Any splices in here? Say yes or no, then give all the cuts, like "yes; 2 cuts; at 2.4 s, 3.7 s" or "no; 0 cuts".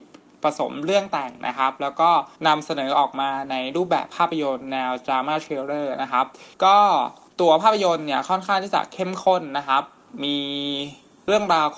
yes; 3 cuts; at 2.4 s, 6.5 s, 7.3 s